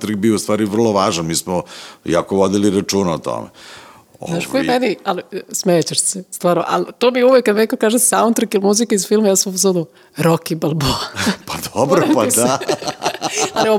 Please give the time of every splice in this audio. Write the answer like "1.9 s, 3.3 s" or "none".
none

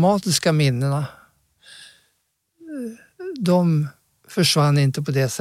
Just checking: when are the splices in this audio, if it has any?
none

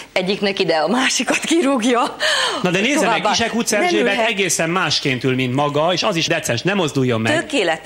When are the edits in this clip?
6.3 s

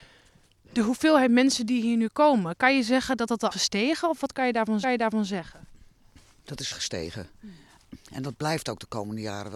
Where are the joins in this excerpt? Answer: 3.5 s, 4.8 s, 6.7 s

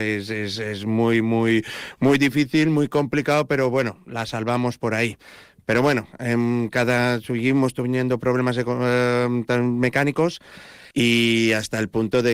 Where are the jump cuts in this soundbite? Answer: 10.9 s

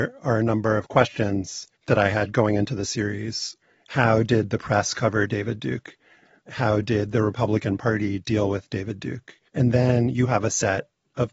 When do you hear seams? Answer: 1.7 s, 9.5 s

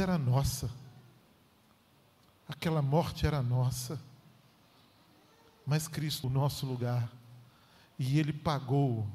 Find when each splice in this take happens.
6.2 s

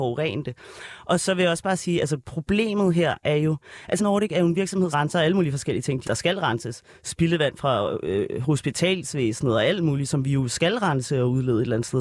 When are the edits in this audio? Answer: 4.0 s, 4.9 s, 6.0 s

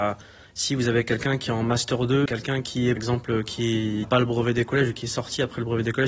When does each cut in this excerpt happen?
2.3 s, 2.6 s, 3.0 s, 4.0 s

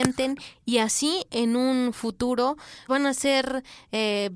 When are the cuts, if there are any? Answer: 2.9 s

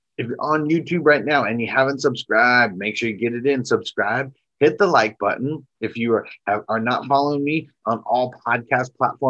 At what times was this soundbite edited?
5.7 s

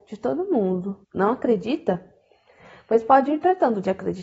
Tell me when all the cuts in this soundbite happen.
1.0 s

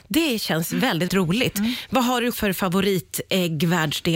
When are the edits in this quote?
1.1 s, 2.3 s

